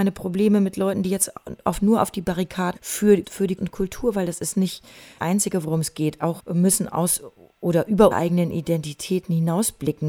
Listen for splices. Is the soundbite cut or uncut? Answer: cut